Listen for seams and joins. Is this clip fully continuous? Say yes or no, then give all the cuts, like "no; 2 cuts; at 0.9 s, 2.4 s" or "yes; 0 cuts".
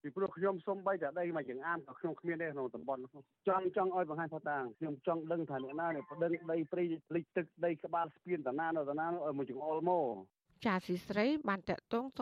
no; 1 cut; at 10.4 s